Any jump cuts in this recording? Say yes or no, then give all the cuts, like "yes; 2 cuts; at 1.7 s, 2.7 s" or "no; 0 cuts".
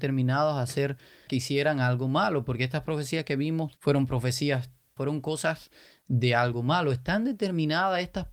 yes; 3 cuts; at 1.3 s, 3.8 s, 5.0 s